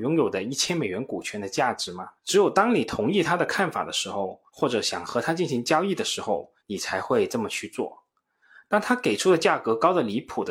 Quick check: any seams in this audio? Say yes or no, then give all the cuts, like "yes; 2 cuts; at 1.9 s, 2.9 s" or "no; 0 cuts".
yes; 3 cuts; at 2.2 s, 4.5 s, 6.6 s